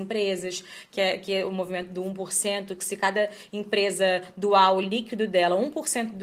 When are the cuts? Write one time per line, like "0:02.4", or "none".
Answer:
none